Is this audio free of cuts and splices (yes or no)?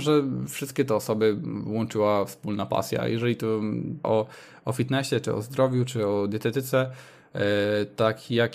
no